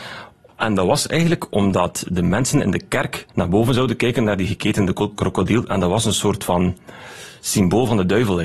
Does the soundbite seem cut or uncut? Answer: cut